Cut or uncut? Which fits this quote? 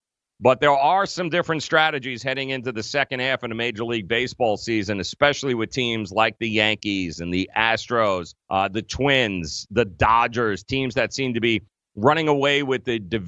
cut